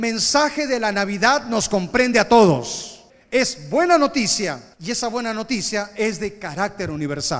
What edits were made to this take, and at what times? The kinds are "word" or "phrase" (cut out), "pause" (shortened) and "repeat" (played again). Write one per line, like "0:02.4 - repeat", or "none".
0:03.1 - pause
0:04.7 - pause